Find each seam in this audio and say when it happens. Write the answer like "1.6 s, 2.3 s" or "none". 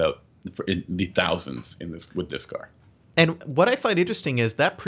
none